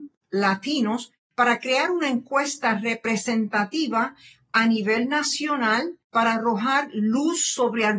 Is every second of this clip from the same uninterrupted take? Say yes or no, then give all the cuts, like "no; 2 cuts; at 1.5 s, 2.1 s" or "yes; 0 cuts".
yes; 0 cuts